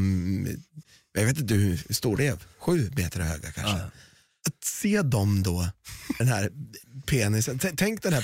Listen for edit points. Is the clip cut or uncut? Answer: cut